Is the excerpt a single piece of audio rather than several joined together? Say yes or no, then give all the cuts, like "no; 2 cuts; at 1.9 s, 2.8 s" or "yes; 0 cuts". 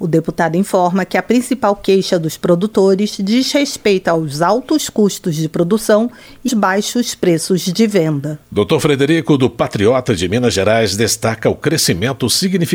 no; 1 cut; at 6.5 s